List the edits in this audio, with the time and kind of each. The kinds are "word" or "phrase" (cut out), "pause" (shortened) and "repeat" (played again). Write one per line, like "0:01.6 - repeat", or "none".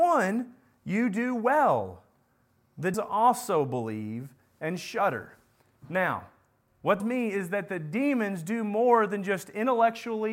0:02.9 - word
0:07.0 - phrase